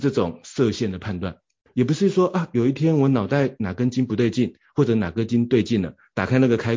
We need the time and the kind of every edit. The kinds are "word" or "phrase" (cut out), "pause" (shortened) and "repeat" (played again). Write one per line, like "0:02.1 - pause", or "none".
none